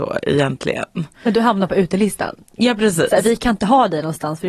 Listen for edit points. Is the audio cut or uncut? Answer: uncut